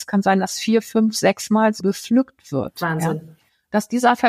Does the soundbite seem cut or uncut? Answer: cut